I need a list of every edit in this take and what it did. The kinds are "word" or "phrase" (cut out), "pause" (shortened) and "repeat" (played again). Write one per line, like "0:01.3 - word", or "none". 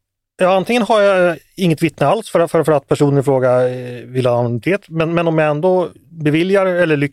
0:06.0 - pause

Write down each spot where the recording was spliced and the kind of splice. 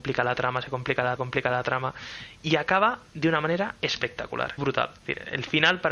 0:01.2 - repeat
0:04.6 - word
0:05.0 - pause

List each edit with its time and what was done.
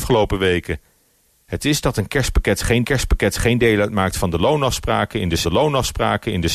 0:02.8 - repeat
0:05.4 - repeat

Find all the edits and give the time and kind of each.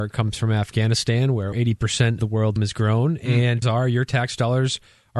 0:01.5 - word
0:02.2 - word
0:02.6 - word
0:03.6 - word

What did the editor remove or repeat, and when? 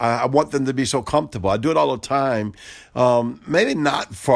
none

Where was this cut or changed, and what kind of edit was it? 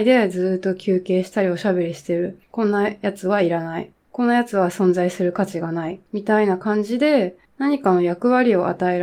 0:02.4 - pause
0:03.9 - pause
0:06.1 - pause
0:07.5 - pause

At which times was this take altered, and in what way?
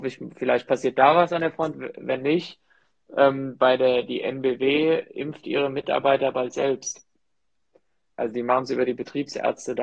none

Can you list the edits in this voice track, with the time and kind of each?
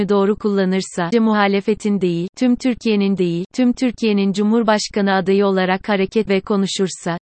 0:01.1 - word
0:03.2 - repeat
0:06.3 - word

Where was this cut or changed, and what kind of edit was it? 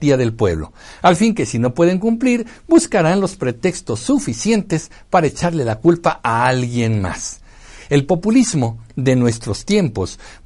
none

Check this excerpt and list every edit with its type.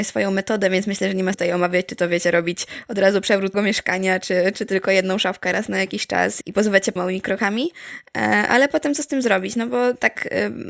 0:01.3 - word
0:03.5 - word
0:04.5 - word
0:06.4 - word
0:07.0 - word

